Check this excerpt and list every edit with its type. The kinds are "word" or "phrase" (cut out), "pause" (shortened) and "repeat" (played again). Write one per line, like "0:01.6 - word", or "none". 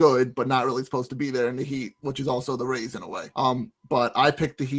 0:03.3 - pause